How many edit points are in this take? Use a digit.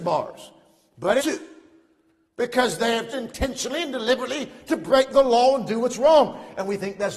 2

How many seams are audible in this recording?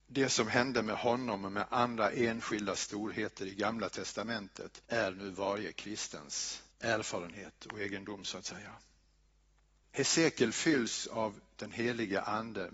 2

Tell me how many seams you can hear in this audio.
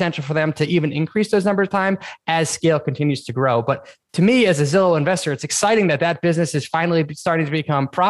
0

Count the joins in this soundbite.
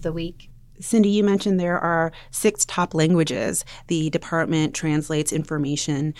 0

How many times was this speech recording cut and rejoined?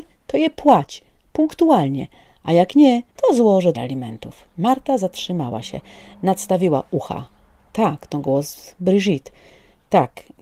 3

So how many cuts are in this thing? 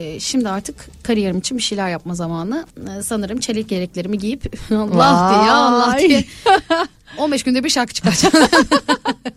1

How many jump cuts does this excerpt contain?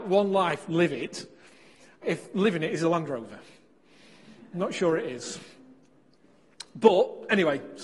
1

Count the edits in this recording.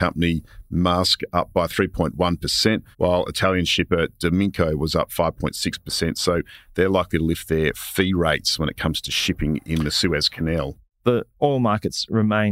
1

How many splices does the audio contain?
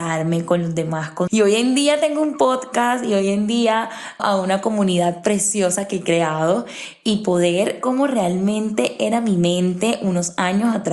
3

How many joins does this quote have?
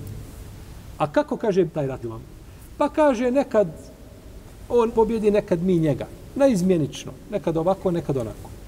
3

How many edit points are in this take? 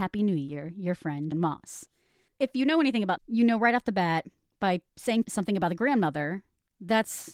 3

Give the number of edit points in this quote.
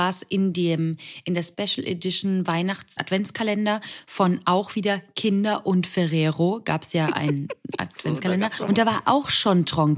2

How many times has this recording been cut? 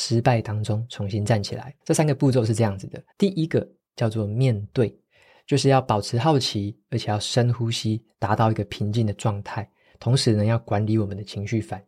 2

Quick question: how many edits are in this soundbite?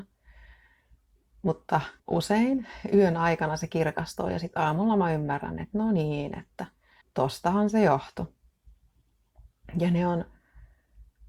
2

